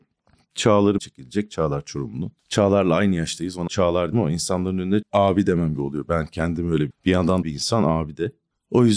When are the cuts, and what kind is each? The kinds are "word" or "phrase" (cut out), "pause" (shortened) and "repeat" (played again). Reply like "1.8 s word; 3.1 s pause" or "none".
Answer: 1.0 s word; 2.4 s pause; 3.7 s word; 4.1 s word; 5.0 s word; 5.8 s phrase; 6.9 s word; 7.4 s phrase